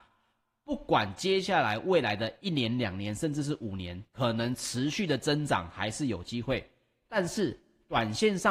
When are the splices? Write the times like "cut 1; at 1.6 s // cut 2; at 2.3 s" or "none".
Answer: cut 1; at 4.1 s